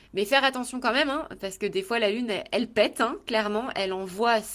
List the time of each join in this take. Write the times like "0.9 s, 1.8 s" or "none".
none